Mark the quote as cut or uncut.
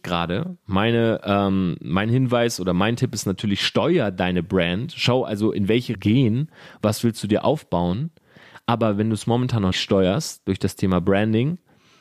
cut